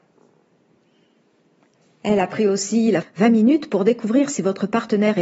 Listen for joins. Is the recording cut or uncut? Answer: cut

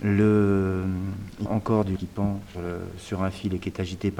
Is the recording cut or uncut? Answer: cut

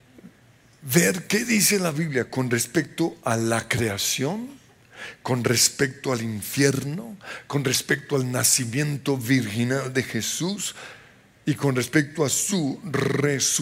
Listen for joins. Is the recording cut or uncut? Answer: uncut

